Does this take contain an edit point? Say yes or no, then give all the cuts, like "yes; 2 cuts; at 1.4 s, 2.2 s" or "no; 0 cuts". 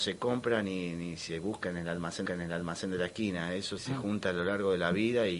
yes; 2 cuts; at 2.3 s, 3.8 s